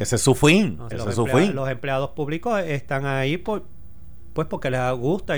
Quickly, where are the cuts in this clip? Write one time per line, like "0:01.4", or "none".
0:00.9